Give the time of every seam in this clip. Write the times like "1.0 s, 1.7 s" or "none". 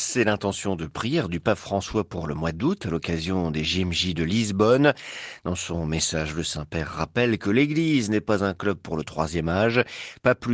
none